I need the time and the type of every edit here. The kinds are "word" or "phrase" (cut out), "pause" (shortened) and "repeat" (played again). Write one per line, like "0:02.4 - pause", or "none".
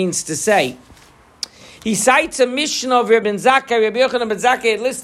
0:03.2 - word

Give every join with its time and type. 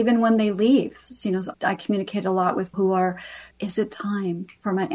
0:01.5 - word
0:02.7 - word
0:03.5 - pause

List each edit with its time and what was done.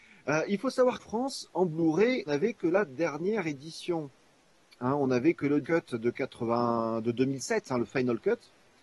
0:01.0 - word
0:02.3 - word
0:05.6 - word

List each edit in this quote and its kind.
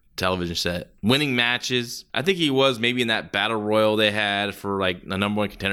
0:01.0 - pause
0:02.1 - pause

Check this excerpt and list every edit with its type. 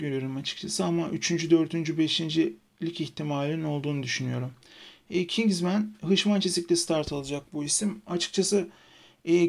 none

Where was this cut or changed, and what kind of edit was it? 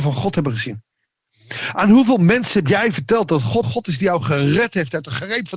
0:03.6 - word

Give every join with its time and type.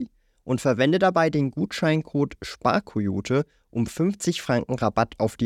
none

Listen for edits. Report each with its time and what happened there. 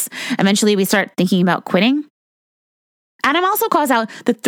none

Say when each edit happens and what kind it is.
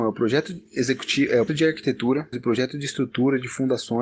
0:01.5 - word
0:02.3 - word

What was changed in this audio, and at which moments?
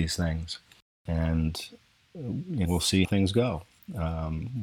0:02.6 - word
0:03.0 - word

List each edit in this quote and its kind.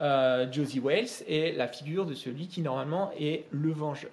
none

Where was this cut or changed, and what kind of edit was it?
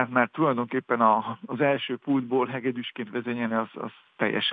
none

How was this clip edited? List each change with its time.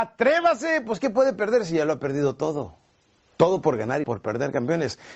0:04.0 - word

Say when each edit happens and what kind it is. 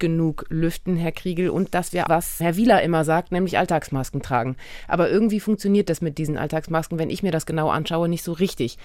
0:02.1 - phrase
0:02.4 - word

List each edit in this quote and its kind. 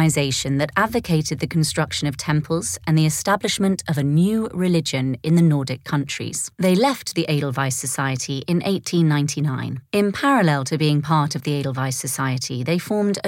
0:06.5 - pause
0:09.9 - pause

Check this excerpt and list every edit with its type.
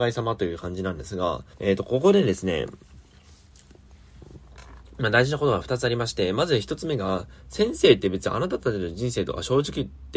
0:01.5 - pause

